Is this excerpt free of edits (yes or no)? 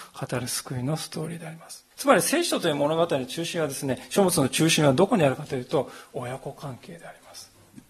no